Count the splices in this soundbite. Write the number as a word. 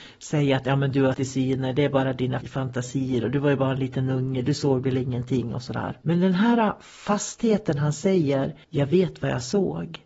four